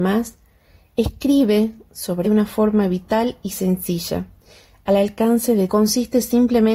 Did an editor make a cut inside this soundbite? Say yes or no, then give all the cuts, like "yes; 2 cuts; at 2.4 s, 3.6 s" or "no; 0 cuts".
yes; 2 cuts; at 2.2 s, 5.7 s